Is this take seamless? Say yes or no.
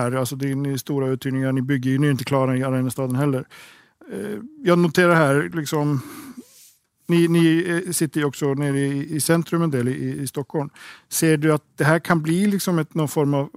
yes